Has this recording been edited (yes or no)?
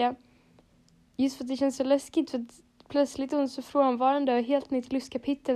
no